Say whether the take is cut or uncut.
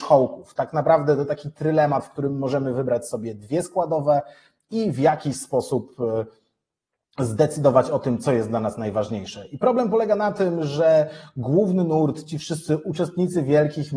uncut